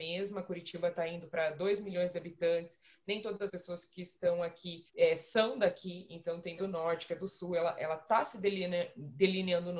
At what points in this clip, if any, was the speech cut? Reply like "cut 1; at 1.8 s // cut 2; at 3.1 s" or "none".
cut 1; at 3.5 s // cut 2; at 4.9 s // cut 3; at 6.6 s